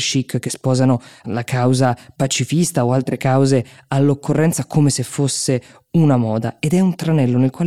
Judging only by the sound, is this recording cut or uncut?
uncut